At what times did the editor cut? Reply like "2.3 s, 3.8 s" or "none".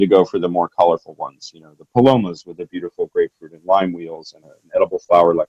1.8 s, 4.4 s